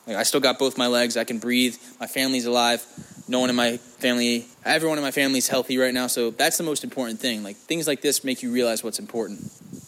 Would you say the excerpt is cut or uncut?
cut